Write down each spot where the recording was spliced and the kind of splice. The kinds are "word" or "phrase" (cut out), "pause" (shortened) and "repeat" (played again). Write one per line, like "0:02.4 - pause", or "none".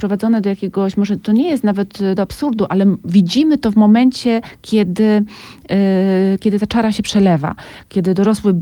0:02.2 - word